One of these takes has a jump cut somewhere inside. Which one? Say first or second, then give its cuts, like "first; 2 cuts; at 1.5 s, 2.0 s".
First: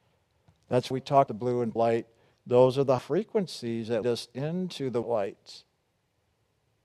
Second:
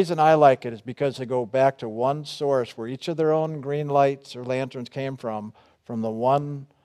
first; 7 cuts; at 0.9 s, 1.3 s, 1.8 s, 2.4 s, 3.0 s, 4.0 s, 5.0 s